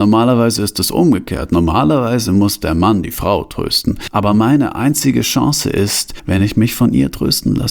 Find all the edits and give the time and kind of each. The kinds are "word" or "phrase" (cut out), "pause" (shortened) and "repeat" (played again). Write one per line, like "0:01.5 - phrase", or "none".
none